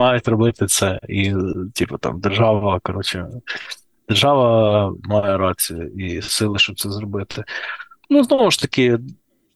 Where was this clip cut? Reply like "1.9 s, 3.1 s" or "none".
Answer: none